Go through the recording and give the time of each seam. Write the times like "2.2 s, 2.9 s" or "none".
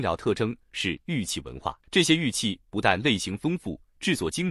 1.8 s